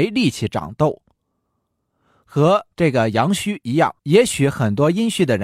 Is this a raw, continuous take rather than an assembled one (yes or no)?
no